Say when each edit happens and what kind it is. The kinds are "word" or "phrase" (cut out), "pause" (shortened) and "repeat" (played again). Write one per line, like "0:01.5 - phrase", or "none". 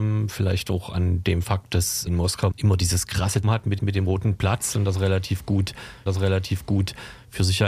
0:02.1 - word
0:02.5 - word
0:03.4 - word
0:03.8 - repeat
0:06.1 - repeat